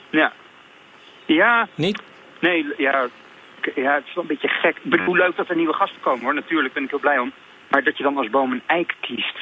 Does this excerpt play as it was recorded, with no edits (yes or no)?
yes